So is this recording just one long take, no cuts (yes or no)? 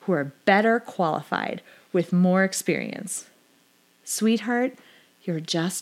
yes